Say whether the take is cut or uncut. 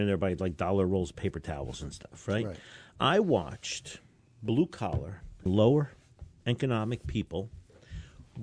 cut